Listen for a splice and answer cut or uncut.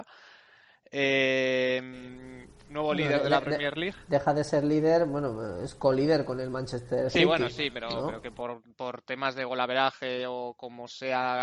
uncut